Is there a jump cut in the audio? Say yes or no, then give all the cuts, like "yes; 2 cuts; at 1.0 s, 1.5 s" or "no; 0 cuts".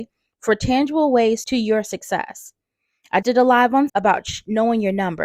yes; 3 cuts; at 1.4 s, 3.2 s, 3.9 s